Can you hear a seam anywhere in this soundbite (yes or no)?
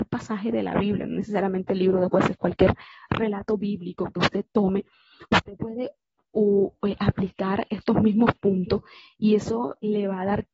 no